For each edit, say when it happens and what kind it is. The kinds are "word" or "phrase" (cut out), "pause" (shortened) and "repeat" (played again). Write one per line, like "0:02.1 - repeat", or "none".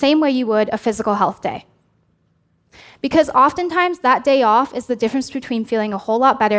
none